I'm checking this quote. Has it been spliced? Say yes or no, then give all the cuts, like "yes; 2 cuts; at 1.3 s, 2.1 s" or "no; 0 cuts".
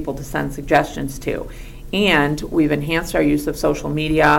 no; 0 cuts